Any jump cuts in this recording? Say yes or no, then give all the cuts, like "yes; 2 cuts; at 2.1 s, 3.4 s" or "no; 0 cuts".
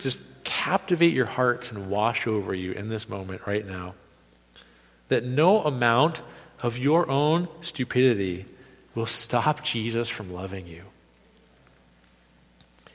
no; 0 cuts